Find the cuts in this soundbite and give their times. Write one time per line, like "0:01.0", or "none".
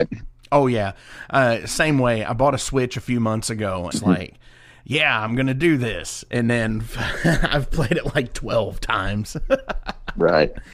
0:03.9

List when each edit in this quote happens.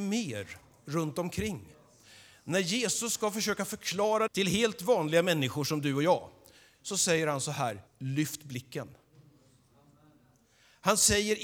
0:04.3
0:07.9

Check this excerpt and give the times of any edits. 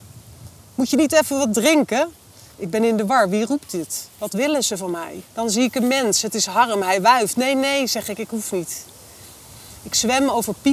0:05.3

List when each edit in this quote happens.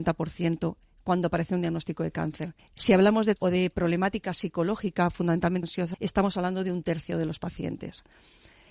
0:02.6
0:03.4
0:05.6
0:05.9

